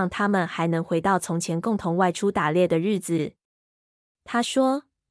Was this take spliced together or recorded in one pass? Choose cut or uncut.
uncut